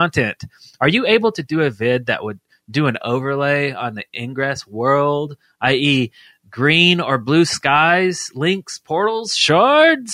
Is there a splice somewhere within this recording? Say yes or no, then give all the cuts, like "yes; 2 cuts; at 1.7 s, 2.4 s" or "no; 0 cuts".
no; 0 cuts